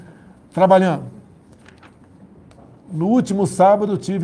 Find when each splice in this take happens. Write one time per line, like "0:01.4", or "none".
none